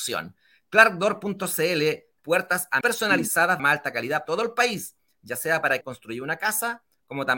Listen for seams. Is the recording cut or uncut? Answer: cut